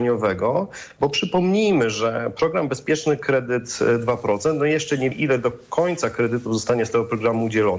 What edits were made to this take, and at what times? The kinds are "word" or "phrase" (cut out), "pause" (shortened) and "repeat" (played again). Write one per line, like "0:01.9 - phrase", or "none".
0:05.1 - word